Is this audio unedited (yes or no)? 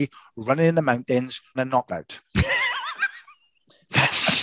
no